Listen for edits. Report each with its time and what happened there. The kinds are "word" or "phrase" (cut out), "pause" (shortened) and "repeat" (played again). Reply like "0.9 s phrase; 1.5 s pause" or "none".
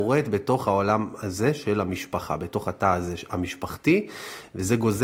none